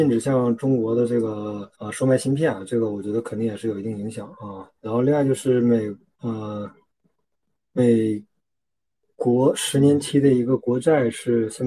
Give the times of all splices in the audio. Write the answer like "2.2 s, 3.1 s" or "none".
1.7 s, 4.8 s